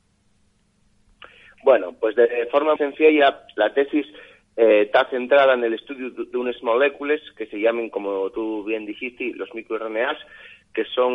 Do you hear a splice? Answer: yes; 1 cut; at 2.8 s

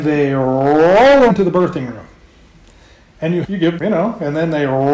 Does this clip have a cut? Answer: yes; 3 cuts; at 1.3 s, 3.4 s, 3.8 s

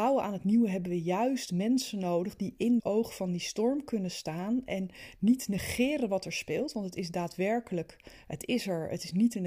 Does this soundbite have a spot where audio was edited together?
yes; 1 cut; at 2.8 s

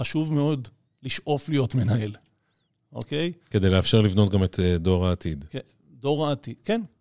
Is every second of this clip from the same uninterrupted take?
yes; 0 cuts

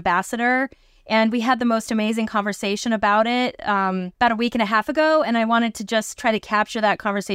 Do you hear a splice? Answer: yes; 1 cut; at 4.1 s

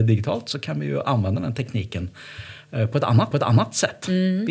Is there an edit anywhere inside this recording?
yes; 1 cut; at 3.3 s

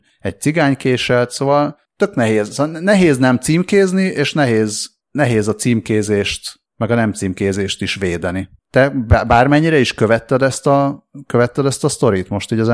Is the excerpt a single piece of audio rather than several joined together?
yes; 0 cuts

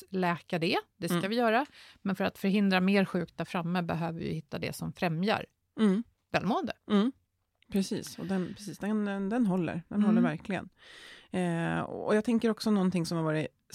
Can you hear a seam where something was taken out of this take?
no; 0 cuts

